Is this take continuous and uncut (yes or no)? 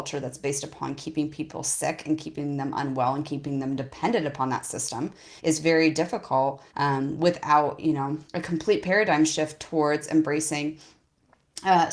no